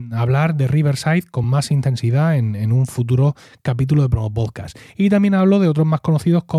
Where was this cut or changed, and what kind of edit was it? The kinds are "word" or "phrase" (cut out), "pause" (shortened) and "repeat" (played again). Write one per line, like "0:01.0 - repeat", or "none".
none